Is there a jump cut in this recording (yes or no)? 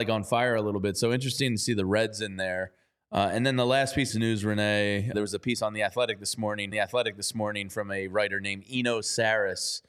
yes